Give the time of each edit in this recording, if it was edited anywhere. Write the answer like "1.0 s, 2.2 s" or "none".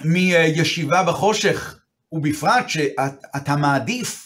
none